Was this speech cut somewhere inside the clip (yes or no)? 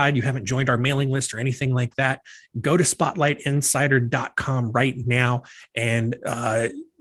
no